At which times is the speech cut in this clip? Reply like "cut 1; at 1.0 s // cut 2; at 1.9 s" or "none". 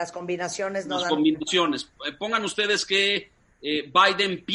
none